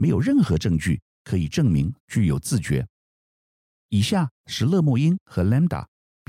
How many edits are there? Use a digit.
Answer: 1